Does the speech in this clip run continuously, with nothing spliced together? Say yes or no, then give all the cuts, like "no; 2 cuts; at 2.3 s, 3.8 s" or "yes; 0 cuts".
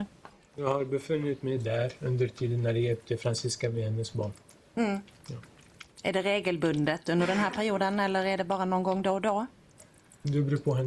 yes; 0 cuts